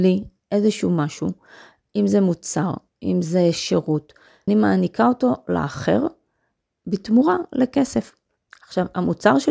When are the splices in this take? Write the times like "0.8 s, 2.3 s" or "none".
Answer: 4.5 s